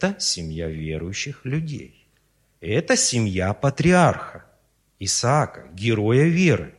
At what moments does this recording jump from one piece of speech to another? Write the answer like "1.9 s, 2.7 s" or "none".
none